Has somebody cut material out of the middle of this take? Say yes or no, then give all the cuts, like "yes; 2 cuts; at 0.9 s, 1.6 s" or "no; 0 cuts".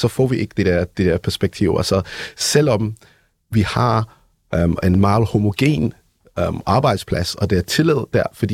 no; 0 cuts